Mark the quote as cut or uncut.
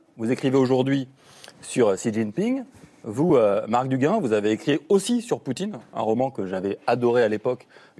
uncut